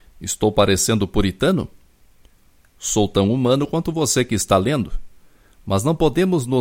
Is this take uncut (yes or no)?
yes